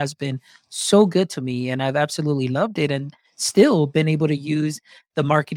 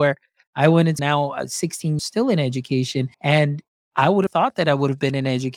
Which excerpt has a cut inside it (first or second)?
second